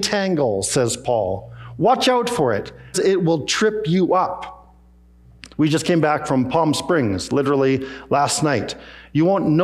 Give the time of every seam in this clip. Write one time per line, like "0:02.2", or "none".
0:02.9
0:05.5